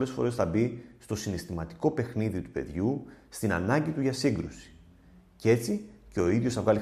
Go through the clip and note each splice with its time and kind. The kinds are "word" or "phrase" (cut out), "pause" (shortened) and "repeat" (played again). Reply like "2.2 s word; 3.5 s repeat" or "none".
none